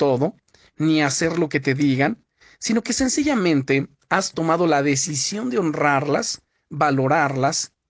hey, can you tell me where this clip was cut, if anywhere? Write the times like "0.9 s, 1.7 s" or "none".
none